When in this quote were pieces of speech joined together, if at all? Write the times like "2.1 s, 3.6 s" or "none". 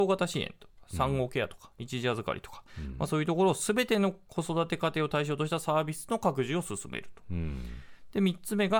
2.7 s

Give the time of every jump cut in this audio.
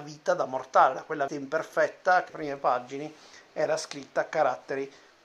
1.3 s, 2.3 s

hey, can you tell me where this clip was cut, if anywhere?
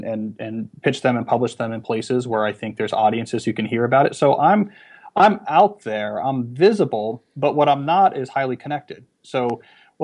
none

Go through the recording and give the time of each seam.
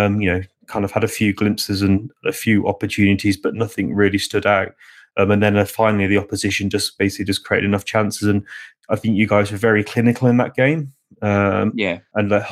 none

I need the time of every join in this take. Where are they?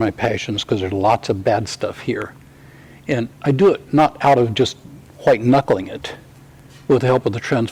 3.4 s

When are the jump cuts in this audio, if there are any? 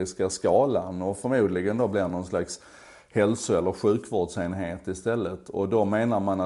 none

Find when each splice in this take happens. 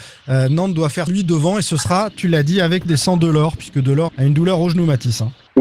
1.1 s, 2.9 s, 4.1 s

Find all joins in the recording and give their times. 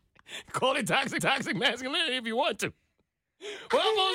1.2 s

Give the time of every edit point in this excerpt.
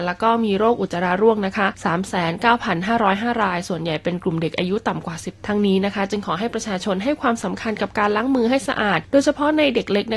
5.4 s

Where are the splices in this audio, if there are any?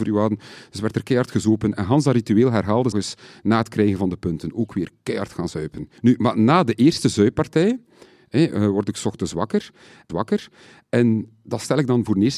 2.9 s, 6.0 s, 10.1 s

